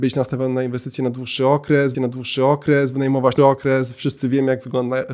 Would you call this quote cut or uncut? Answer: cut